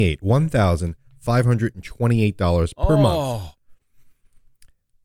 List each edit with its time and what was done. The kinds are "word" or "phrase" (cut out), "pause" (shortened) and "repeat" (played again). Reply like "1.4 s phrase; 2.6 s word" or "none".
none